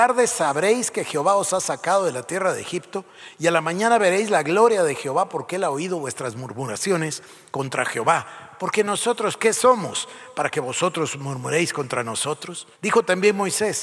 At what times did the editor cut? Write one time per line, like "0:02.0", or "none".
0:12.7